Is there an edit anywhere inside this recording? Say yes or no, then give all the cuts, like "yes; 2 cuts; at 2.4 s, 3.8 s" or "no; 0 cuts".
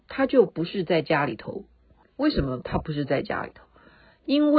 yes; 1 cut; at 2.0 s